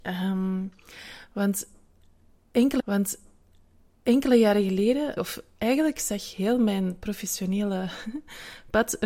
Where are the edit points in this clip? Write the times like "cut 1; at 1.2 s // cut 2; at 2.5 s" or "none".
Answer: cut 1; at 2.8 s // cut 2; at 5.2 s